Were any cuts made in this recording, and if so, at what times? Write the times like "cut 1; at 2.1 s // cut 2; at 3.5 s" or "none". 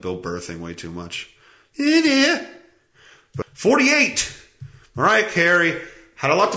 cut 1; at 3.4 s

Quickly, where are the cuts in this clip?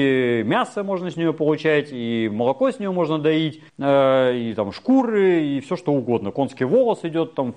cut 1; at 3.7 s

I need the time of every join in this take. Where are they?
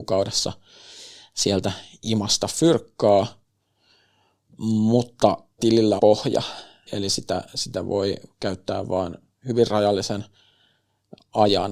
cut 1; at 5.6 s // cut 2; at 6.0 s // cut 3; at 6.9 s

